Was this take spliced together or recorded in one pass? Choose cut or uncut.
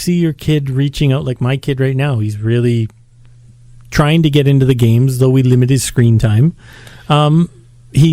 uncut